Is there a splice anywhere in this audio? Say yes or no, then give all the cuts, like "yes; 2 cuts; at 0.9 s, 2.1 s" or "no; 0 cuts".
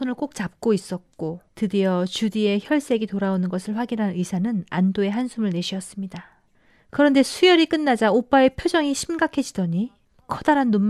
yes; 1 cut; at 1.5 s